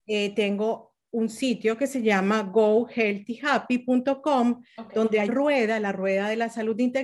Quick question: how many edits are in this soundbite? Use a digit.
1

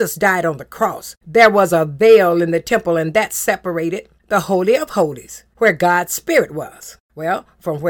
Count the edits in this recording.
0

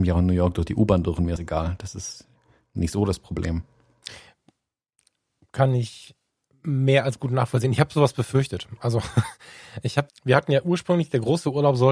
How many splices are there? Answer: 2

